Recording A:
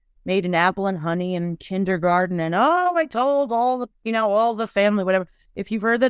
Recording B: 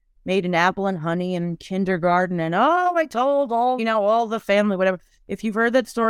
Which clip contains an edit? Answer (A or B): B